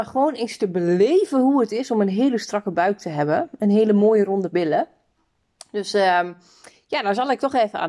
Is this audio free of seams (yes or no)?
yes